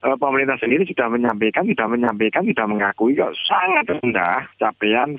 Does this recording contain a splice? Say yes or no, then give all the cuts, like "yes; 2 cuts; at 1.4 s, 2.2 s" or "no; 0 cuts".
yes; 1 cut; at 1.9 s